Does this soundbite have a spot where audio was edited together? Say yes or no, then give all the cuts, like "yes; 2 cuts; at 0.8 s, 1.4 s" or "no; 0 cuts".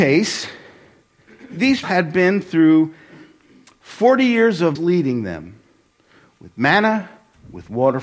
yes; 2 cuts; at 1.8 s, 4.8 s